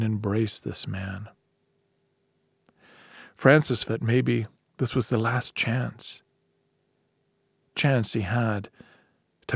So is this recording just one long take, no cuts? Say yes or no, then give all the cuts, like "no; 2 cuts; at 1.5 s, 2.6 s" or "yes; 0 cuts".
no; 3 cuts; at 3.8 s, 4.5 s, 7.7 s